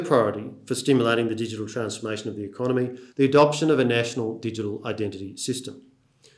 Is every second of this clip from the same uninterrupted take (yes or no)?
no